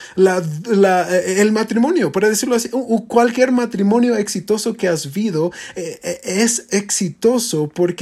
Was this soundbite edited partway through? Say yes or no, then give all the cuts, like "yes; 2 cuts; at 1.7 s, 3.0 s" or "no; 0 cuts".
no; 0 cuts